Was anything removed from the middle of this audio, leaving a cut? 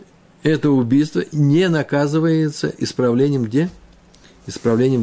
no; 0 cuts

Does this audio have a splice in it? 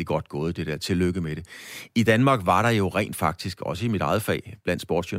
no; 0 cuts

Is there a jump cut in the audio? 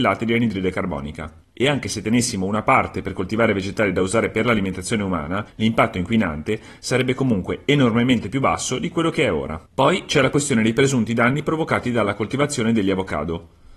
yes; 3 cuts; at 1.4 s, 5.5 s, 9.7 s

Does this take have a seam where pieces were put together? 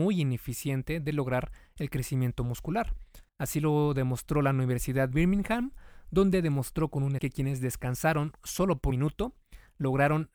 yes; 4 cuts; at 3.3 s, 5.1 s, 7.2 s, 8.9 s

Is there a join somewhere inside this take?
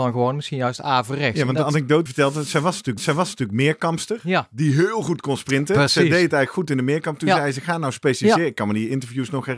yes; 2 cuts; at 2.1 s, 3.0 s

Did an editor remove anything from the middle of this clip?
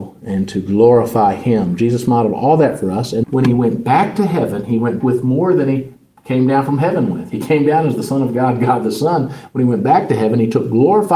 yes; 2 cuts; at 3.2 s, 5.0 s

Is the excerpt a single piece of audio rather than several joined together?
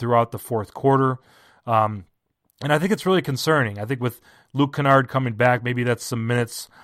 yes; 0 cuts

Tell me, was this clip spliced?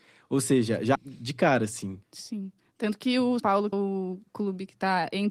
yes; 4 cuts; at 0.9 s, 2.0 s, 3.4 s, 3.7 s

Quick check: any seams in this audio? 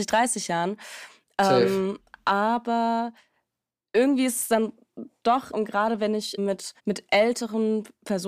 yes; 3 cuts; at 5.5 s, 6.4 s, 6.8 s

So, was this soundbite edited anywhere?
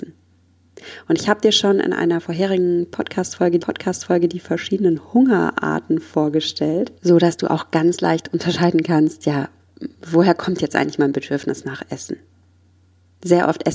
yes; 3 cuts; at 3.6 s, 7.0 s, 9.9 s

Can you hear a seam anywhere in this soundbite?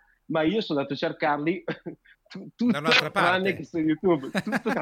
no; 0 cuts

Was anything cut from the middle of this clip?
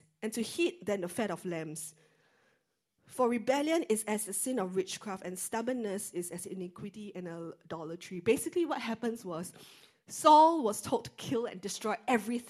no; 0 cuts

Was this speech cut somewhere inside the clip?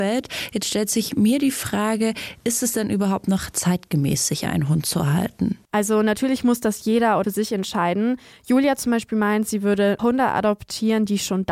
yes; 3 cuts; at 5.6 s, 7.2 s, 10.0 s

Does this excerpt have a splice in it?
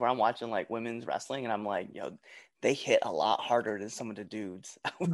no; 0 cuts

